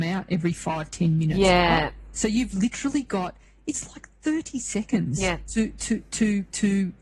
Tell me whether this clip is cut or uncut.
uncut